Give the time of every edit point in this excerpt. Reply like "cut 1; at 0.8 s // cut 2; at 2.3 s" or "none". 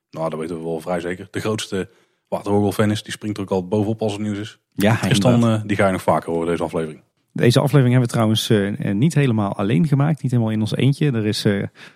none

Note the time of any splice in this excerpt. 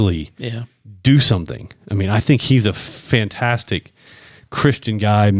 none

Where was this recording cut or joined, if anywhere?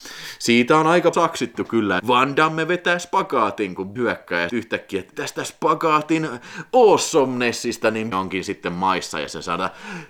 cut 1; at 1.1 s // cut 2; at 2.0 s // cut 3; at 4.0 s // cut 4; at 4.5 s // cut 5; at 5.1 s // cut 6; at 8.1 s

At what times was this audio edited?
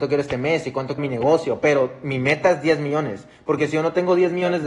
cut 1; at 1.0 s

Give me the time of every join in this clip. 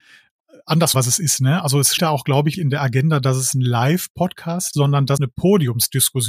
cut 1; at 0.9 s // cut 2; at 2.0 s // cut 3; at 2.5 s // cut 4; at 4.7 s // cut 5; at 5.2 s

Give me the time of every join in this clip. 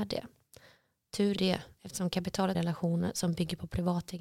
cut 1; at 1.4 s // cut 2; at 2.5 s

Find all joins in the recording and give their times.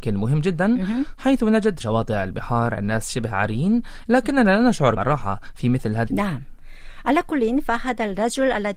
cut 1; at 1.8 s // cut 2; at 5.0 s // cut 3; at 6.1 s

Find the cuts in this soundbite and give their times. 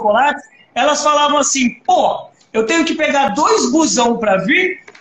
none

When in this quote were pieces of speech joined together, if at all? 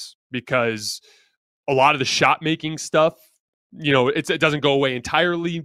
none

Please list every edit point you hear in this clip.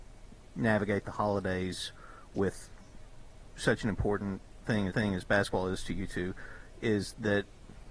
cut 1; at 4.9 s

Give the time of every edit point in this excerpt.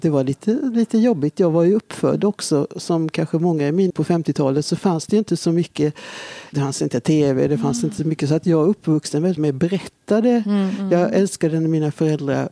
cut 1; at 3.9 s // cut 2; at 6.5 s // cut 3; at 9.4 s

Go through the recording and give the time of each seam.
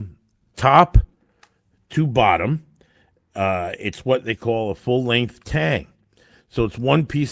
none

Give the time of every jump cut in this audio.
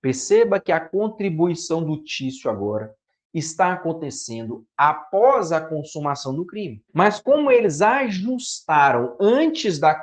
cut 1; at 6.9 s

